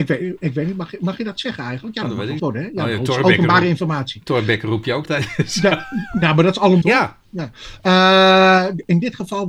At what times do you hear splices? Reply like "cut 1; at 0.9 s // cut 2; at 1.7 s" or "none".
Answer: cut 1; at 2.4 s // cut 2; at 5.1 s // cut 3; at 6.8 s // cut 4; at 7.2 s